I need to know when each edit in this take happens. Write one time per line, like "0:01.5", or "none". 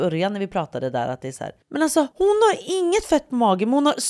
0:01.6
0:02.1